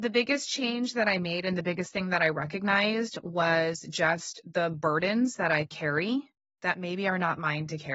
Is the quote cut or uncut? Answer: cut